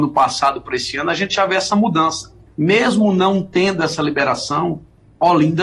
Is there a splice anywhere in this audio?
yes; 1 cut; at 2.5 s

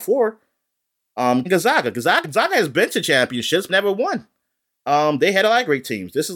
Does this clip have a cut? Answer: yes; 3 cuts; at 1.5 s, 2.2 s, 3.7 s

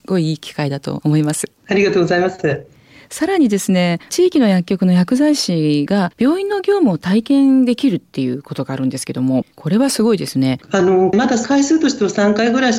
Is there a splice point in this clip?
yes; 2 cuts; at 1.6 s, 10.6 s

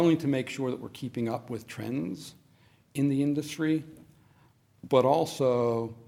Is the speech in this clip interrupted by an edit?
no; 0 cuts

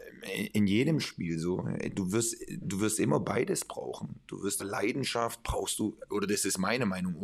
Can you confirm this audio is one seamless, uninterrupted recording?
no; 1 cut; at 4.6 s

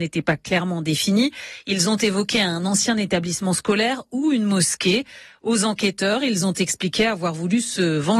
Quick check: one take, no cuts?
yes; 0 cuts

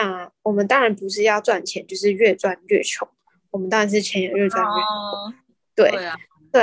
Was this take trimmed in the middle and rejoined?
no; 0 cuts

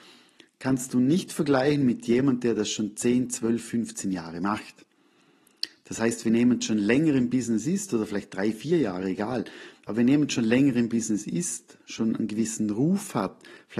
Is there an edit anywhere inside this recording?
no; 0 cuts

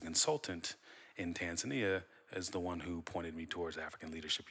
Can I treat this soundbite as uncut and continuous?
yes; 0 cuts

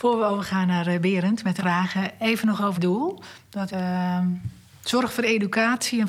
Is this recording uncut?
no; 3 cuts; at 1.6 s, 2.7 s, 3.7 s

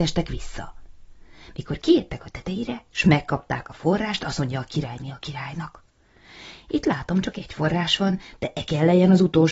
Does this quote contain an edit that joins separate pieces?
no; 0 cuts

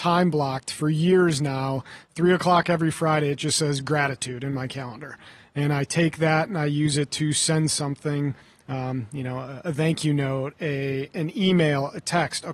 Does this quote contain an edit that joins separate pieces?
no; 0 cuts

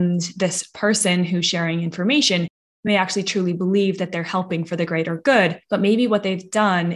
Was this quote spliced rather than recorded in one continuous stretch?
no; 0 cuts

